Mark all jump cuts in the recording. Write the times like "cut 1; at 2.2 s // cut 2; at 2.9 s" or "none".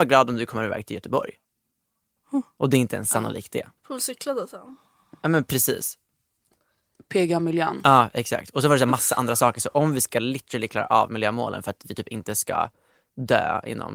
cut 1; at 3.8 s